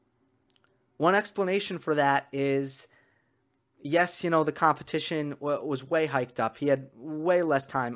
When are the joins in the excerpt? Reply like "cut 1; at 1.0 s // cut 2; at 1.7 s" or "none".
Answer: none